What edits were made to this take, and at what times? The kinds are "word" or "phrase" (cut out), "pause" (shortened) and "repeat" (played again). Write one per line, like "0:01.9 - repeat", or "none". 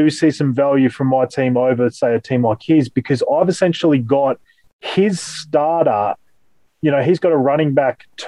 none